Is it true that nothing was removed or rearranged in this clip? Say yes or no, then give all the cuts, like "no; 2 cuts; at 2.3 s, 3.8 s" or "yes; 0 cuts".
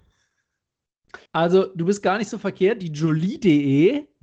no; 1 cut; at 1.3 s